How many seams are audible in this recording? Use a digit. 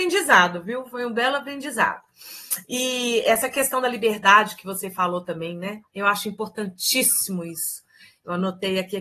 0